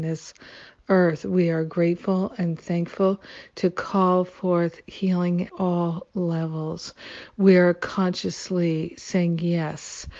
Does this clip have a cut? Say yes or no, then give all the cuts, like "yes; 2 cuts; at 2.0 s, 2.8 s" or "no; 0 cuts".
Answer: yes; 1 cut; at 5.5 s